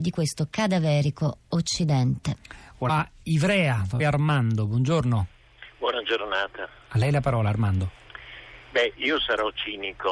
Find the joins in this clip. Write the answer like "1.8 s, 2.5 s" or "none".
2.9 s, 4.0 s